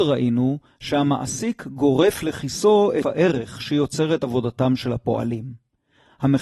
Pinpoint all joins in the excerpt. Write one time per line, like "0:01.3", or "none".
0:03.0